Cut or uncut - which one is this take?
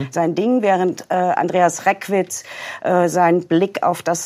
uncut